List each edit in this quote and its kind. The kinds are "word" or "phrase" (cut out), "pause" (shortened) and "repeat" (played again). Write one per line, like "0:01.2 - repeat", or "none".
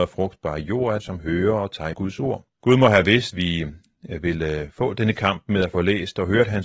0:01.0 - word
0:01.9 - word
0:02.5 - pause
0:03.3 - word